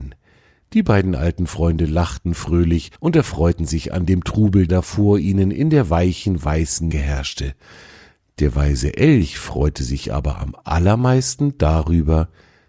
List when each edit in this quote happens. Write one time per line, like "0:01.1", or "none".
0:03.0
0:04.7
0:06.9